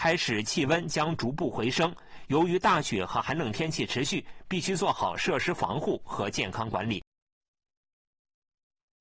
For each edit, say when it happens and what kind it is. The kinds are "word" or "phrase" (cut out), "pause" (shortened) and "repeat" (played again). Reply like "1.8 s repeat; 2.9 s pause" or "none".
none